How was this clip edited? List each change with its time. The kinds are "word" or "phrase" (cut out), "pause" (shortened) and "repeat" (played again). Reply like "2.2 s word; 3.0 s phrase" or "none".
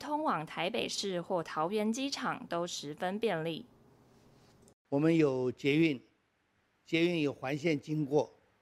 none